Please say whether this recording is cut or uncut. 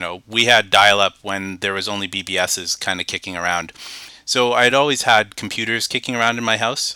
uncut